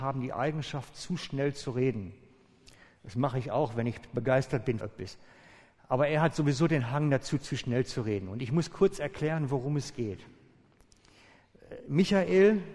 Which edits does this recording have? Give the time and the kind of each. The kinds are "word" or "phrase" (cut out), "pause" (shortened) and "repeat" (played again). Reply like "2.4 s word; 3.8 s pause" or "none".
4.8 s word